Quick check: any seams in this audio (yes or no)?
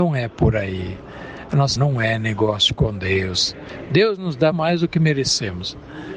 yes